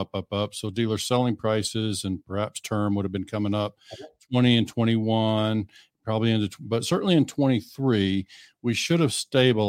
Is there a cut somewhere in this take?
no; 0 cuts

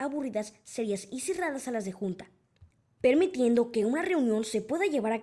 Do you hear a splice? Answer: no; 0 cuts

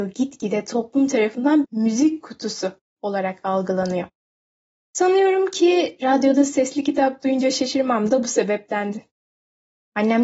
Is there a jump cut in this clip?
yes; 1 cut; at 1.6 s

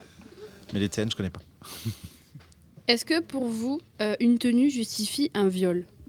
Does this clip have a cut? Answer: no; 0 cuts

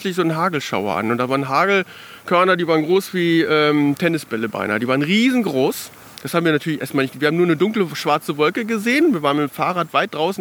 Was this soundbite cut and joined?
no; 0 cuts

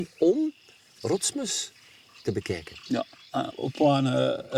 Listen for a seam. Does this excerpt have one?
yes; 1 cut; at 3.5 s

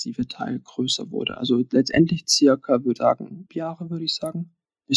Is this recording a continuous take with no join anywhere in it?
no; 2 cuts; at 3.0 s, 3.5 s

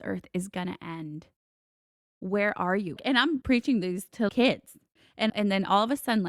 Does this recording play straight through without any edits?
no; 4 cuts; at 3.0 s, 3.4 s, 4.3 s, 5.3 s

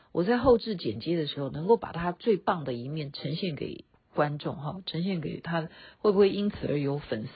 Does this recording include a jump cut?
yes; 1 cut; at 3.9 s

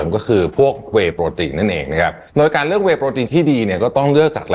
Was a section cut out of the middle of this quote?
yes; 1 cut; at 2.3 s

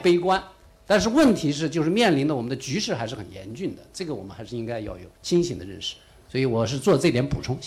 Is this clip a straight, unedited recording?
no; 1 cut; at 5.1 s

